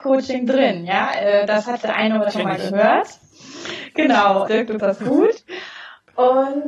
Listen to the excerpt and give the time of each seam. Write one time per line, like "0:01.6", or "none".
0:01.8
0:02.3
0:04.5
0:04.8